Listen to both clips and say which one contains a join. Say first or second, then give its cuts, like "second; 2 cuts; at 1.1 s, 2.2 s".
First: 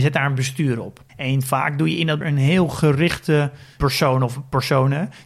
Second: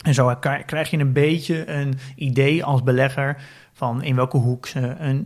first; 2 cuts; at 1.1 s, 2.2 s